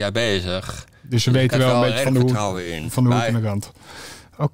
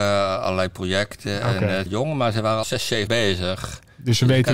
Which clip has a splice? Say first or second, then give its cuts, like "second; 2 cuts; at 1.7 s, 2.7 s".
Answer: second; 3 cuts; at 1.9 s, 2.6 s, 3.1 s